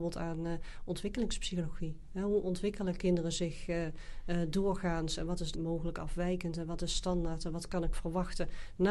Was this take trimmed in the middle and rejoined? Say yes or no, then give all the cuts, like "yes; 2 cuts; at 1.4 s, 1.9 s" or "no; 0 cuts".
yes; 1 cut; at 5.5 s